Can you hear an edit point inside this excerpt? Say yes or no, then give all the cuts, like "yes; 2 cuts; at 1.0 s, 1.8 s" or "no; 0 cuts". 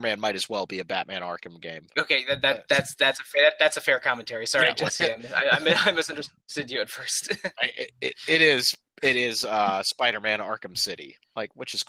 no; 0 cuts